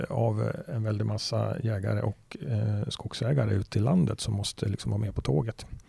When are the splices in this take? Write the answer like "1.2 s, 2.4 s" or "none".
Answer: none